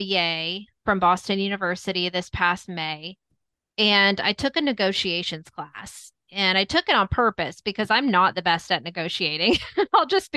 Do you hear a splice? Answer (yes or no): no